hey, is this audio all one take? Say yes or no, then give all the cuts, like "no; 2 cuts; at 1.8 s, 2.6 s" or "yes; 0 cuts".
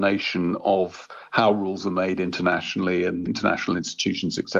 yes; 0 cuts